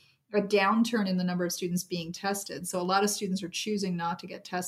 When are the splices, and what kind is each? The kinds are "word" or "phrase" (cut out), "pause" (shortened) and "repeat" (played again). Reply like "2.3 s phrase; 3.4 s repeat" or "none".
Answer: none